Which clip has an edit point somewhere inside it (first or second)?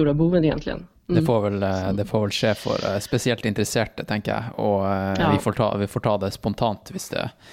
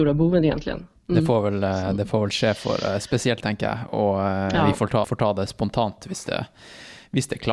second